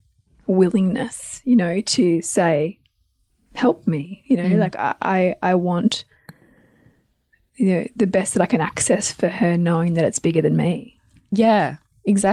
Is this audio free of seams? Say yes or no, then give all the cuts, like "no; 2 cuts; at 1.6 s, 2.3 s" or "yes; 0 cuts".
yes; 0 cuts